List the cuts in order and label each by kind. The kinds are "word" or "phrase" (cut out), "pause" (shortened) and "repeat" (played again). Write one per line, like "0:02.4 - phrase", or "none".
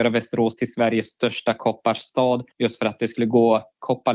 0:02.5 - pause